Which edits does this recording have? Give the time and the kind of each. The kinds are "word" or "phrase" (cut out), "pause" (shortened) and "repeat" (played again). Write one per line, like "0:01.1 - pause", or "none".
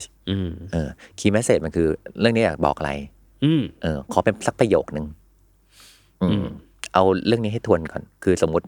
none